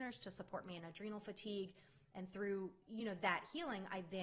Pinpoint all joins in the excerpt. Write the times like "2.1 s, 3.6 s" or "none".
none